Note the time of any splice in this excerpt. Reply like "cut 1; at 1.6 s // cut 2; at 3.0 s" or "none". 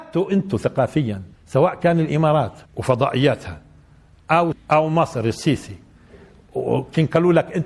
cut 1; at 1.3 s // cut 2; at 2.7 s // cut 3; at 4.5 s